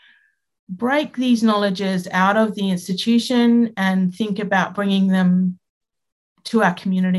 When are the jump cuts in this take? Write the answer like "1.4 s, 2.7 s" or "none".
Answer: none